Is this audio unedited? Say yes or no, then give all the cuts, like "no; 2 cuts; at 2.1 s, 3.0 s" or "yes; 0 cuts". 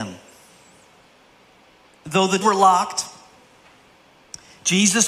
no; 1 cut; at 2.4 s